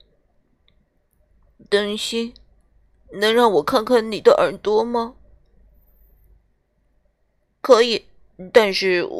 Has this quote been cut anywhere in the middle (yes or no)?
no